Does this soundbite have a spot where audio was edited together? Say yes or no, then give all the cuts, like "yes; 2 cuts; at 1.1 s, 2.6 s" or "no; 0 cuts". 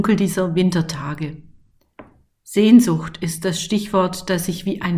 no; 0 cuts